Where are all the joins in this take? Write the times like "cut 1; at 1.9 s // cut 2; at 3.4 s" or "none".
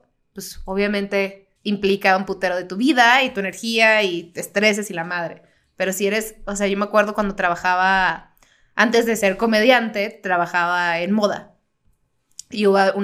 cut 1; at 1.6 s